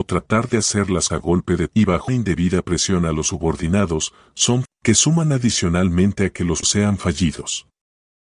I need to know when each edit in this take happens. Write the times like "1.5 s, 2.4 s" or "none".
1.1 s, 1.7 s, 2.1 s, 4.6 s, 6.6 s